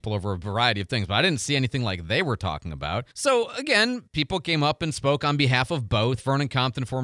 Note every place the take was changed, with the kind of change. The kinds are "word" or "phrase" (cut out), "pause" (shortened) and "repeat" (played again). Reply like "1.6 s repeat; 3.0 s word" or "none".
3.1 s pause; 4.1 s pause